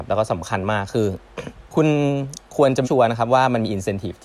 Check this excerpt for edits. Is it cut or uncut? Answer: cut